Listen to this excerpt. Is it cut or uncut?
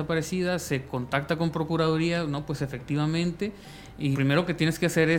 cut